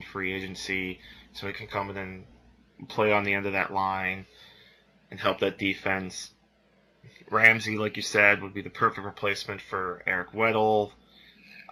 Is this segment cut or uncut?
uncut